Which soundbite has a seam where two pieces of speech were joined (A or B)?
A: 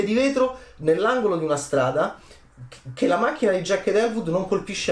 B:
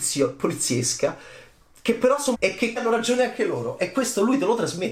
B